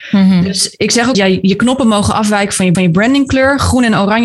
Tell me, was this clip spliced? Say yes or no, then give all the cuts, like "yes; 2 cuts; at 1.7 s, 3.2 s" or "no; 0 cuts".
yes; 2 cuts; at 1.1 s, 2.7 s